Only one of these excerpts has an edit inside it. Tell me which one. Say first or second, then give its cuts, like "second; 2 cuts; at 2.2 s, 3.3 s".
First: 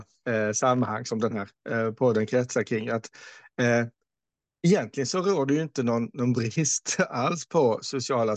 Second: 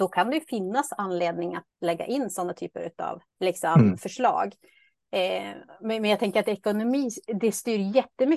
second; 1 cut; at 3.3 s